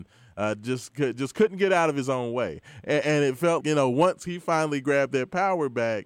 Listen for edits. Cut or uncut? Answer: cut